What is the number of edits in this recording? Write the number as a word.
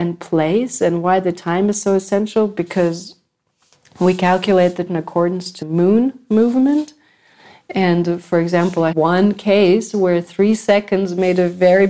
three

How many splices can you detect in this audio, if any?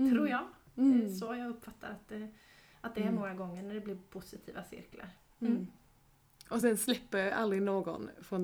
zero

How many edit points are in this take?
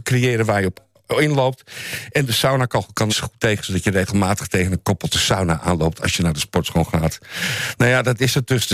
one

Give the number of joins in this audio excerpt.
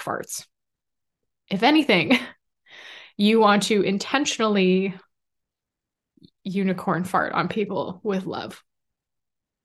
zero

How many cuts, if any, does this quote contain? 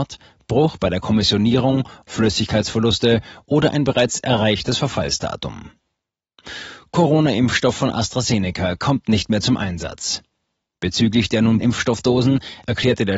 two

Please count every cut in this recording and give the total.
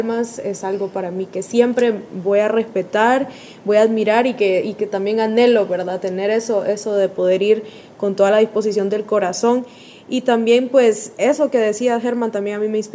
zero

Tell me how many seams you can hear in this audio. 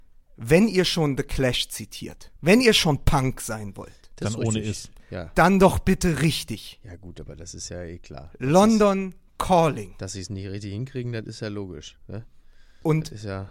one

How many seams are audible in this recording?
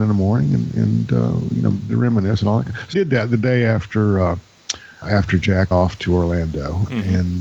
four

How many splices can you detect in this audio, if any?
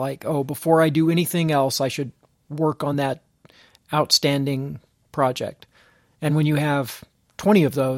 zero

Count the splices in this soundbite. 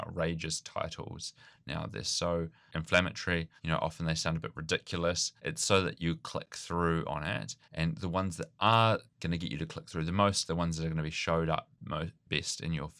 five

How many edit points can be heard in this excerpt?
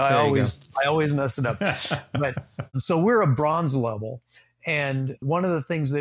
zero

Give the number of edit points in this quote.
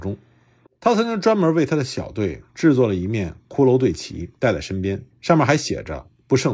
three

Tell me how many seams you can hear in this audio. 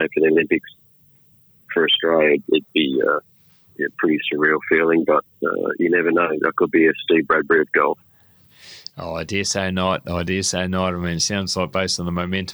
two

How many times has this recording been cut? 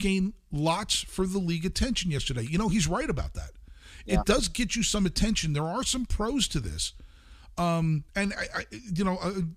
one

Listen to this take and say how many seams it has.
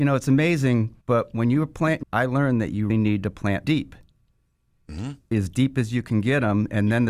five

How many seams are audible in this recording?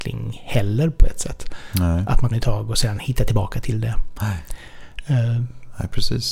one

